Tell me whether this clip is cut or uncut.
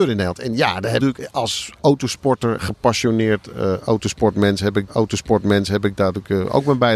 cut